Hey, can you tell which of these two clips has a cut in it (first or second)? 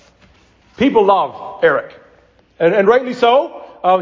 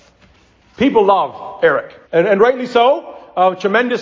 second